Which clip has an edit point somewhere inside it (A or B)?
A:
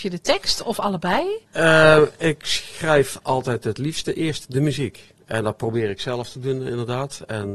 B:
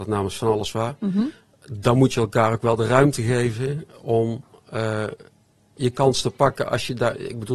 A